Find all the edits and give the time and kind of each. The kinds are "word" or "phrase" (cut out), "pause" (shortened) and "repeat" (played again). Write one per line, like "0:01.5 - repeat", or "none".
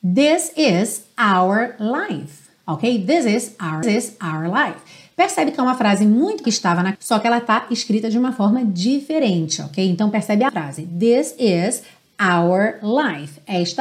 0:03.8 - repeat
0:06.4 - phrase
0:06.9 - word
0:10.5 - phrase